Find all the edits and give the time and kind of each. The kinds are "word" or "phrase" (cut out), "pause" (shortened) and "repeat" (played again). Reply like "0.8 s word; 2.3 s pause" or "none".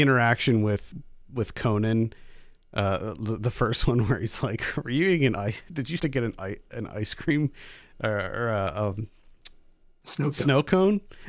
6.0 s word